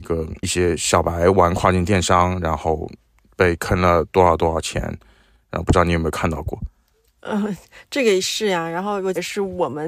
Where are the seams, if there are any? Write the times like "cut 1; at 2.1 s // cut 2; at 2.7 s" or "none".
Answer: none